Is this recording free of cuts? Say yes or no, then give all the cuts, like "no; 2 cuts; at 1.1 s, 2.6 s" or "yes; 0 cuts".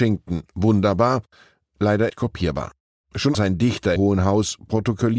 no; 3 cuts; at 2.1 s, 3.3 s, 4.0 s